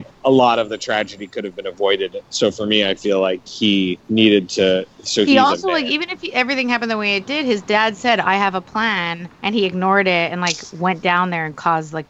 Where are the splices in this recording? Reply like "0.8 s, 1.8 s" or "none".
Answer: 4.0 s, 9.3 s